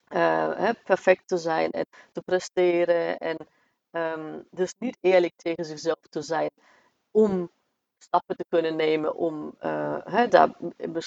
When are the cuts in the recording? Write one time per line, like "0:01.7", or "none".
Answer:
none